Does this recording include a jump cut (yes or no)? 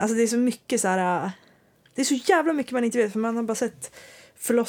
no